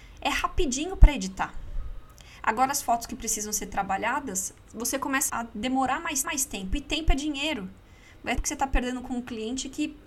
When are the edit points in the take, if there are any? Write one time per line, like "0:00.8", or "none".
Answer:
0:05.3
0:06.2
0:08.4

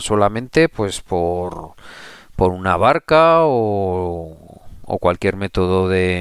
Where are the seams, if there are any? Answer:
none

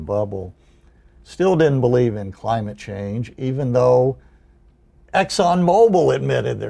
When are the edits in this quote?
none

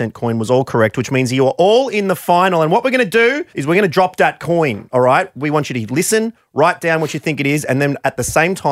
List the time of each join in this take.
0:03.5

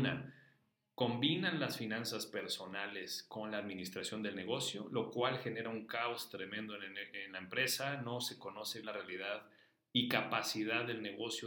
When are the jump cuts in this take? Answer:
0:08.8

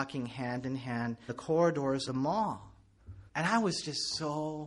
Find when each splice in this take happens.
0:01.3
0:02.1
0:03.3

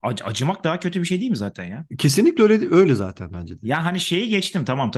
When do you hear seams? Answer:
0:01.9

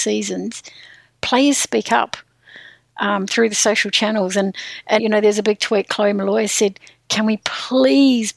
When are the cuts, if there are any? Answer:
0:05.0

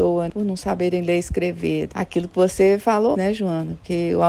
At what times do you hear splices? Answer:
0:03.1

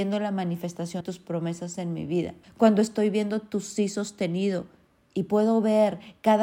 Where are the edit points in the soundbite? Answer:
0:01.0
0:02.4

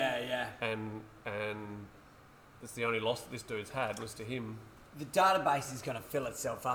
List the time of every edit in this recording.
none

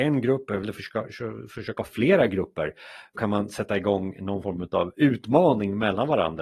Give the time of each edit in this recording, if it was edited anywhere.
0:01.8
0:03.2

